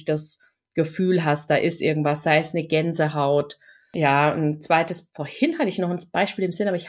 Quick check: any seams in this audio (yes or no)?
no